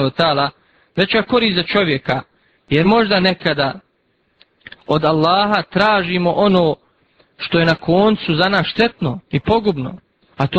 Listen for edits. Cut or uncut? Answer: uncut